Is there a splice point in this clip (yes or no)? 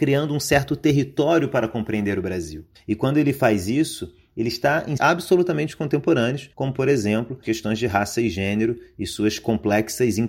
yes